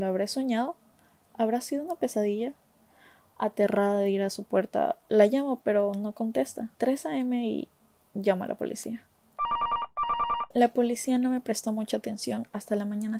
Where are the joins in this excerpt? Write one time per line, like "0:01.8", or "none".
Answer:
0:05.0
0:06.7
0:10.5